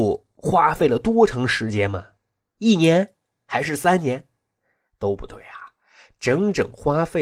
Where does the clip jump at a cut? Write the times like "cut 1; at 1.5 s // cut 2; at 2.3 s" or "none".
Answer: none